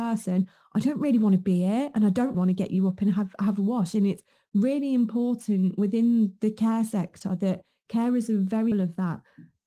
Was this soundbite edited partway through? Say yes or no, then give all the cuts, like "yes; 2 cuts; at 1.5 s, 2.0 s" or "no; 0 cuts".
yes; 2 cuts; at 2.3 s, 8.7 s